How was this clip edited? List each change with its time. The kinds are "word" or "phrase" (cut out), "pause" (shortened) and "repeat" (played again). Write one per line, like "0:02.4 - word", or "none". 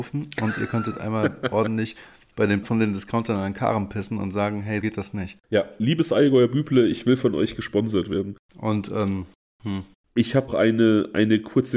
0:02.6 - word
0:04.8 - word
0:10.5 - word